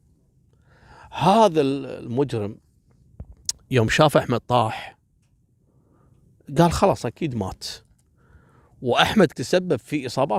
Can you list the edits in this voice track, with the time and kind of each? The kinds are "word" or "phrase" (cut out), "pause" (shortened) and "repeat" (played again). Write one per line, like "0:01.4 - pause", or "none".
0:09.3 - word